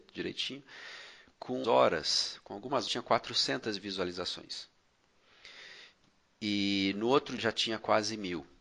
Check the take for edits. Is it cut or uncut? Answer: cut